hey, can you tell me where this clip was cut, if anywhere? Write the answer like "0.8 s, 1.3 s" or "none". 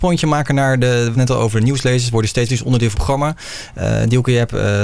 1.1 s, 2.5 s, 2.9 s

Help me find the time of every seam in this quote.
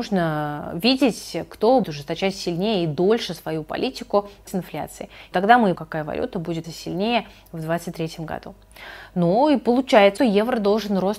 1.8 s, 4.5 s, 5.3 s, 5.7 s, 6.6 s, 10.2 s

